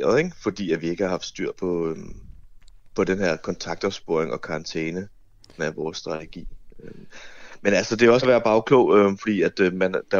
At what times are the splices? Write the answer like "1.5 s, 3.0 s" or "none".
1.5 s, 5.6 s, 8.2 s

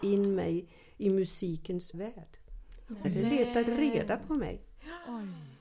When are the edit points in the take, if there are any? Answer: 1.9 s, 3.0 s

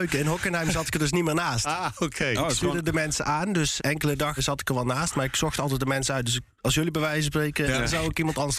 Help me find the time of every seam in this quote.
3.8 s, 4.4 s, 7.6 s

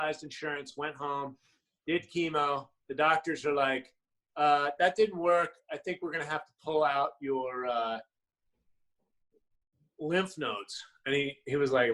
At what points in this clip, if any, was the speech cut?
none

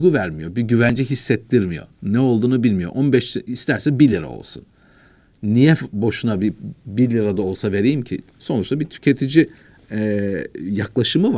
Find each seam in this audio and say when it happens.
none

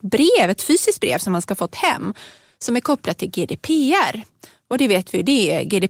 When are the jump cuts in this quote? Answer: none

